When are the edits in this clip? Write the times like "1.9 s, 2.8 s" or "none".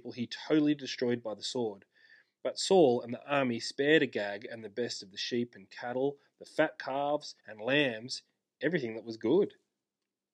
7.4 s

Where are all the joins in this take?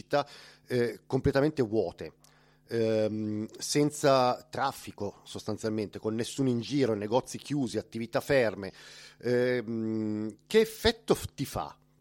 none

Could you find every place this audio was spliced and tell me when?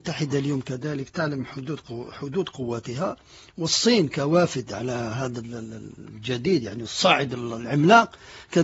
none

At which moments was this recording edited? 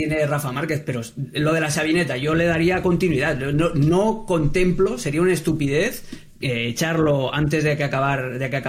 6.3 s

